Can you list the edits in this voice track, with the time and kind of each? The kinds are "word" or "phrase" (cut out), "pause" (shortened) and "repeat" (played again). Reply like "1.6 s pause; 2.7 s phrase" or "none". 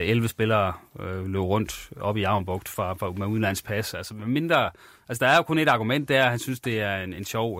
none